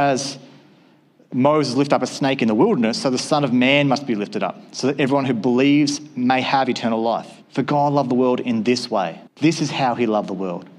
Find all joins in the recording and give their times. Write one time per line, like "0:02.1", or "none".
0:07.4
0:09.3